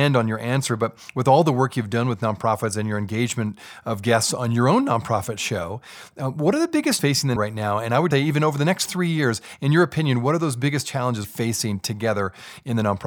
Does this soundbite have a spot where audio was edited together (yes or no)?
yes